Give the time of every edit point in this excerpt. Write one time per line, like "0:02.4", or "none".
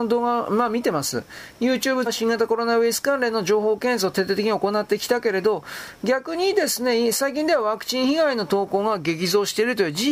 0:02.1